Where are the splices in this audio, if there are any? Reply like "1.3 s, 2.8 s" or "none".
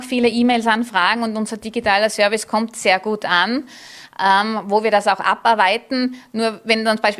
none